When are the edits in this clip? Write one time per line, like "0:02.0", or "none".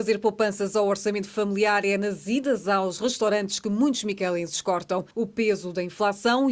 0:05.1